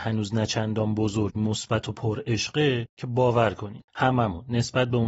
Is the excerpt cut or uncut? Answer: cut